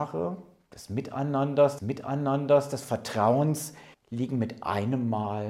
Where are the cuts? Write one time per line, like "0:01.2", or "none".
0:01.8
0:03.9